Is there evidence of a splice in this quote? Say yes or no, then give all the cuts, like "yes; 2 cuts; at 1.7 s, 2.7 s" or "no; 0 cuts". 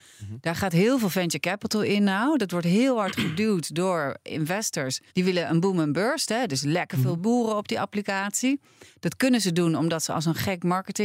yes; 1 cut; at 5.1 s